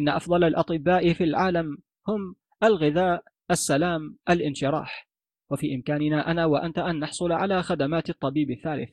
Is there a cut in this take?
no; 0 cuts

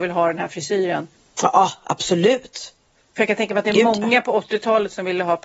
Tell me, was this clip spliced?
yes; 1 cut; at 1.1 s

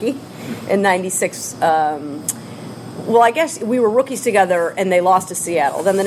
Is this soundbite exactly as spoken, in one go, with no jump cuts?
yes; 0 cuts

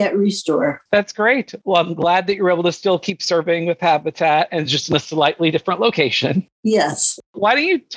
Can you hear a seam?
no; 0 cuts

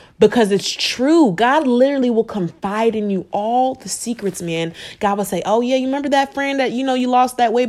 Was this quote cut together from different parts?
no; 0 cuts

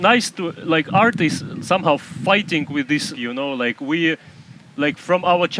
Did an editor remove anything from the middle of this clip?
yes; 1 cut; at 3.1 s

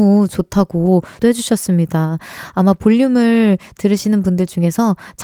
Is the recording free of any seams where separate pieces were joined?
no; 1 cut; at 1.2 s

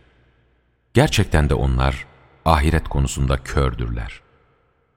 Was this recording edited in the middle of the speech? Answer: no; 0 cuts

